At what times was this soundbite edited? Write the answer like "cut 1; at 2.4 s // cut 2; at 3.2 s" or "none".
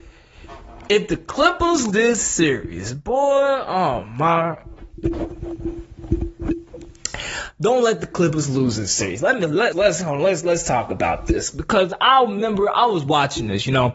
cut 1; at 1.9 s // cut 2; at 9.7 s